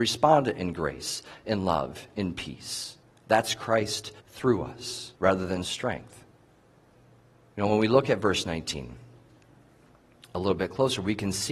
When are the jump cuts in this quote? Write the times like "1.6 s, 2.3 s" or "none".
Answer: 3.0 s, 4.2 s, 5.2 s, 5.6 s